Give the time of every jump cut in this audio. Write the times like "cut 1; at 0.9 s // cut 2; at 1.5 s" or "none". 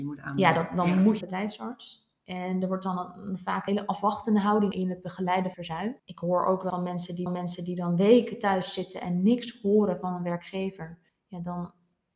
cut 1; at 1.2 s // cut 2; at 3.7 s // cut 3; at 4.7 s // cut 4; at 5.5 s // cut 5; at 6.0 s // cut 6; at 6.7 s // cut 7; at 7.3 s // cut 8; at 11.1 s